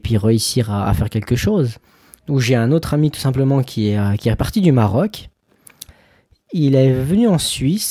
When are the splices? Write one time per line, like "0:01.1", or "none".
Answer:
none